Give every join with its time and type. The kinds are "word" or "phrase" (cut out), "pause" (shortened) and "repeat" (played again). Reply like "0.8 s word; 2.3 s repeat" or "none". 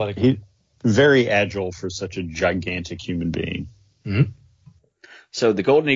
none